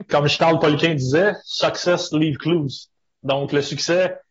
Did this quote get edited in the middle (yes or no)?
no